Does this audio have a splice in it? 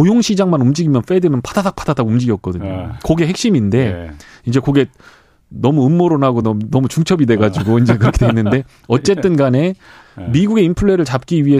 no; 0 cuts

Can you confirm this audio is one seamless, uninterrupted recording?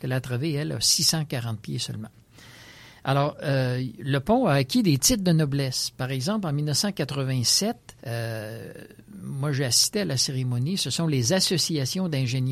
no; 1 cut; at 8.0 s

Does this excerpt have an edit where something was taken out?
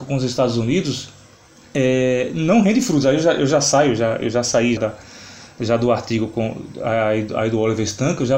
yes; 2 cuts; at 1.4 s, 4.8 s

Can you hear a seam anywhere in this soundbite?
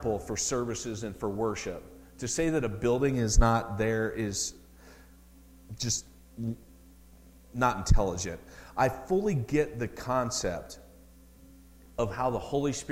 no; 0 cuts

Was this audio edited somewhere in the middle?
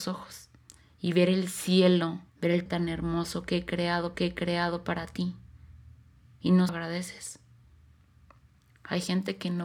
yes; 4 cuts; at 2.3 s, 2.7 s, 4.1 s, 6.7 s

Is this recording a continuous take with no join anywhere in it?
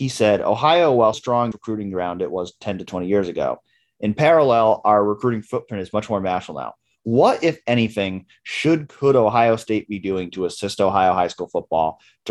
no; 2 cuts; at 1.1 s, 1.5 s

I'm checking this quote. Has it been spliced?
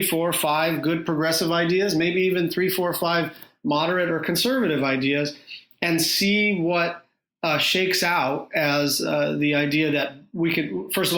no; 0 cuts

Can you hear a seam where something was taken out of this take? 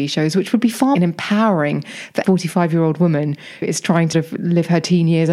yes; 4 cuts; at 0.9 s, 2.2 s, 3.6 s, 4.1 s

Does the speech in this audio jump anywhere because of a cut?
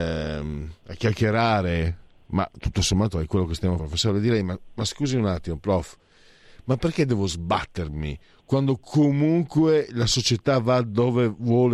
yes; 1 cut; at 3.8 s

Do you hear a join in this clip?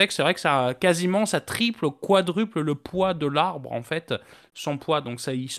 no; 0 cuts

